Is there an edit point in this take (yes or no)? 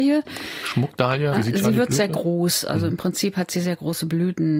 yes